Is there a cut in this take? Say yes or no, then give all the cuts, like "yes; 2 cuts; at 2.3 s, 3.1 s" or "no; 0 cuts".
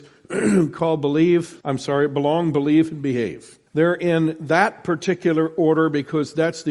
yes; 2 cuts; at 1.6 s, 3.7 s